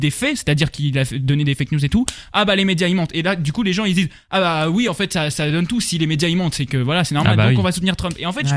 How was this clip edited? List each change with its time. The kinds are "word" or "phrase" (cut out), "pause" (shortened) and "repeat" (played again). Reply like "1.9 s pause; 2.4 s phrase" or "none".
none